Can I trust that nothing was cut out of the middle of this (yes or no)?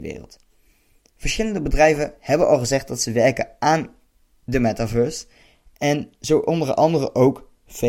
yes